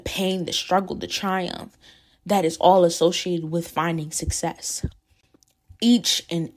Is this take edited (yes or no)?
no